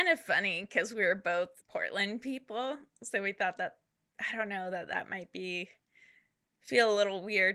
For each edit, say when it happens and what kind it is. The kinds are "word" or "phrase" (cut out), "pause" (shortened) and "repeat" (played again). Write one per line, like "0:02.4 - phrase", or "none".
0:01.6 - pause